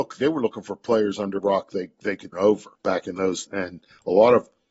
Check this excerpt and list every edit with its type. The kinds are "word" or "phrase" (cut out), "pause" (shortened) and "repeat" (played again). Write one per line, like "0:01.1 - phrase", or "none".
0:01.4 - word
0:02.3 - word
0:02.7 - pause
0:03.4 - word